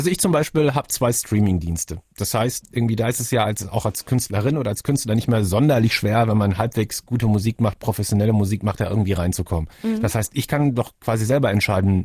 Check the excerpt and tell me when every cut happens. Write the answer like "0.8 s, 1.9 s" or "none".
none